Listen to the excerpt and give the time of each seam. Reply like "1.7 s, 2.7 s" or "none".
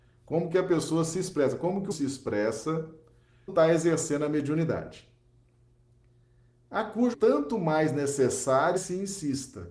1.9 s, 3.5 s, 7.1 s, 8.8 s